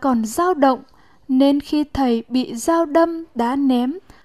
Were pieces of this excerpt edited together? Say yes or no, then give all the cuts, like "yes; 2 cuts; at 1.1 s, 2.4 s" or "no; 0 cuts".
no; 0 cuts